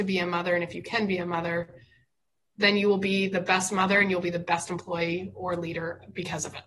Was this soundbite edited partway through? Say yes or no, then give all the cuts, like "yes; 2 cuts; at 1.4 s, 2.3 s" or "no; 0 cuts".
no; 0 cuts